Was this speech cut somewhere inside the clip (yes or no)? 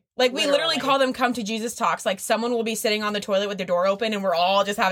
no